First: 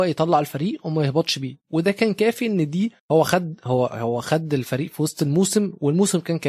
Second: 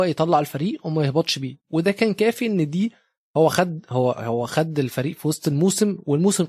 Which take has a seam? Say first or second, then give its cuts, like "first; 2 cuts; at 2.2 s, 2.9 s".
first; 1 cut; at 3.0 s